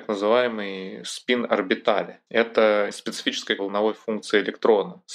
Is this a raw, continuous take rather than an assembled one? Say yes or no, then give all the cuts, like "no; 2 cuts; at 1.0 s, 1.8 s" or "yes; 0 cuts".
no; 2 cuts; at 2.9 s, 3.6 s